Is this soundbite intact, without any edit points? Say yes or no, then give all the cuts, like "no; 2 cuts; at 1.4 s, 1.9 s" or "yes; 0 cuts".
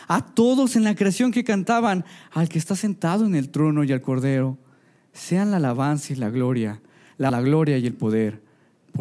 no; 1 cut; at 7.3 s